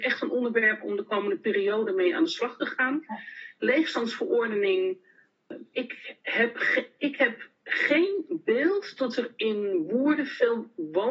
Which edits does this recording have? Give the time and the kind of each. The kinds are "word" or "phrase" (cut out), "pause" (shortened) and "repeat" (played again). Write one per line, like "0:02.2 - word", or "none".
0:07.5 - pause